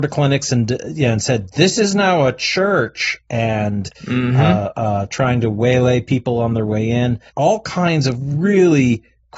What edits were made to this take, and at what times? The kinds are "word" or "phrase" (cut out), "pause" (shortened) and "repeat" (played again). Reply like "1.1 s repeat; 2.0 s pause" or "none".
3.9 s pause; 7.3 s pause

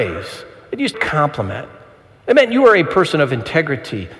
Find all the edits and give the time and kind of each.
0.9 s phrase

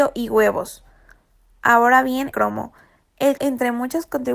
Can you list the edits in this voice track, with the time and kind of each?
2.3 s word; 3.4 s word

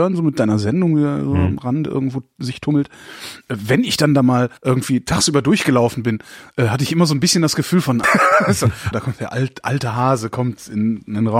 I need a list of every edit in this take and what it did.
4.6 s pause; 8.0 s word; 8.9 s word

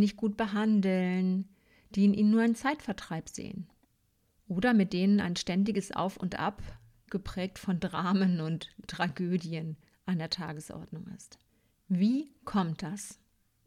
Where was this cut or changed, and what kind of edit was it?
none

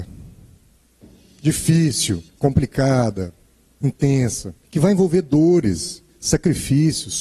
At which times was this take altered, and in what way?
2.3 s pause; 4.6 s pause

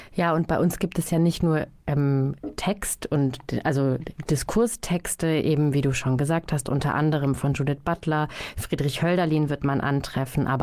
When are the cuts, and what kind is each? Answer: none

